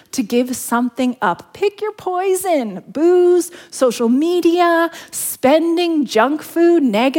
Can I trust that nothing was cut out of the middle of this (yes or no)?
yes